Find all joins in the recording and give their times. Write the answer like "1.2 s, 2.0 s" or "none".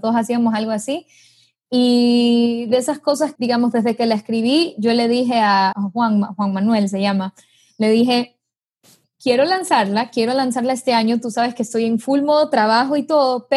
3.4 s, 5.7 s